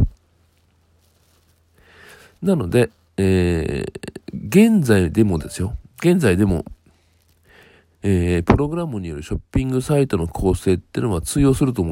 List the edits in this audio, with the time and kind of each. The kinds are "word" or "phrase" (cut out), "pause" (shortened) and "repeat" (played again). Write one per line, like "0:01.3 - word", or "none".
none